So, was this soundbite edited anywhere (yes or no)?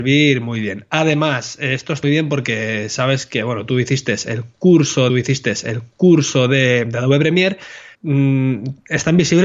yes